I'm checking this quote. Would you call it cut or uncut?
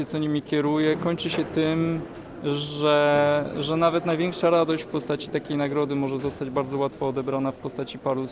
uncut